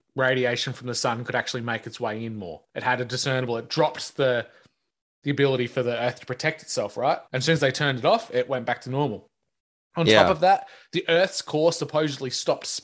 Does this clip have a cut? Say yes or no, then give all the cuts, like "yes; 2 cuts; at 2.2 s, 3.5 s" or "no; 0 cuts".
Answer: yes; 1 cut; at 7.3 s